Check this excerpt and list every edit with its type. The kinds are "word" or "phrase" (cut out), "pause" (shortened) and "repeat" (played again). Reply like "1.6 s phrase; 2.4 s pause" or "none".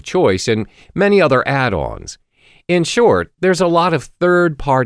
none